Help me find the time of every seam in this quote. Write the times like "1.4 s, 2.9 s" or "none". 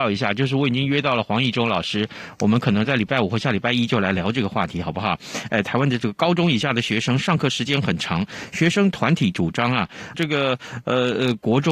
10.1 s